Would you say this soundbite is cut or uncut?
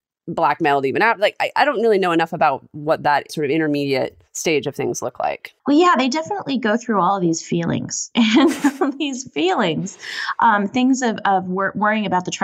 cut